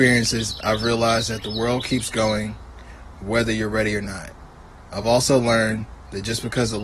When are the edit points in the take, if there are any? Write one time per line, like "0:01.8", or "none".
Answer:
none